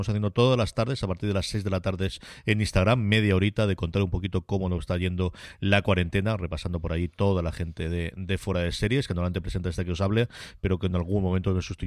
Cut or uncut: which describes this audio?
uncut